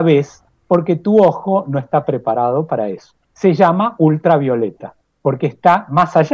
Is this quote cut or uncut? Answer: uncut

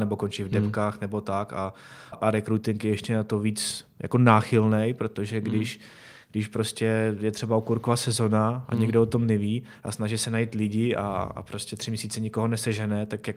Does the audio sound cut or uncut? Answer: cut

